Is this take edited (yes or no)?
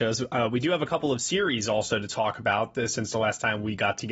no